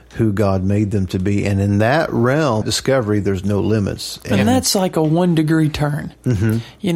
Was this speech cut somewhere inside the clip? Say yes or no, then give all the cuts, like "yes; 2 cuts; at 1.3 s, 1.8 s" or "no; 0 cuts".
yes; 1 cut; at 2.6 s